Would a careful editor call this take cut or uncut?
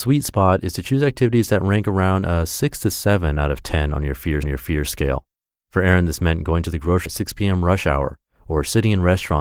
cut